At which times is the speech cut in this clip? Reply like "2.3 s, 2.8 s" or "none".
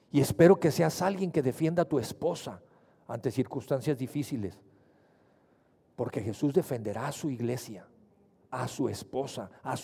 none